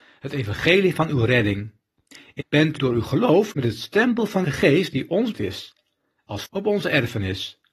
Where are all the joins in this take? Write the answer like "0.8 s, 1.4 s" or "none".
2.4 s, 2.8 s, 3.5 s, 4.4 s, 5.3 s, 6.5 s